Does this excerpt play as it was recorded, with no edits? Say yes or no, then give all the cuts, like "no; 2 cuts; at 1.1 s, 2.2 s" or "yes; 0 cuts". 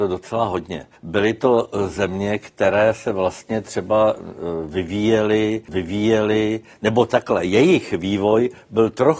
no; 2 cuts; at 1.0 s, 5.7 s